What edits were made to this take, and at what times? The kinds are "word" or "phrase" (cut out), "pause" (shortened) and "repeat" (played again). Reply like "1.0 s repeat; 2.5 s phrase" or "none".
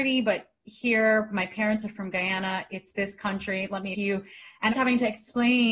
3.9 s phrase; 4.7 s word